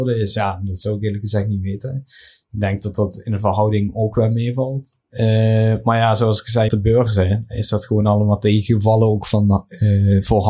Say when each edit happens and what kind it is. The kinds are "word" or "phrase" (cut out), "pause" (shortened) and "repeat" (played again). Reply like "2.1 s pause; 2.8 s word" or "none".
5.0 s pause; 6.7 s word